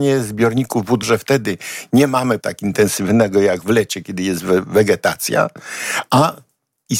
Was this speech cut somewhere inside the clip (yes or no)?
yes